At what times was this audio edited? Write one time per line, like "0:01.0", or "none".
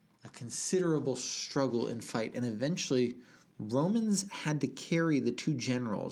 none